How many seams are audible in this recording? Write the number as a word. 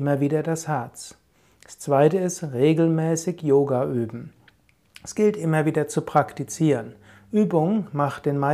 zero